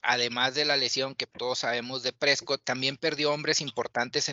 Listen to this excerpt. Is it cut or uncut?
cut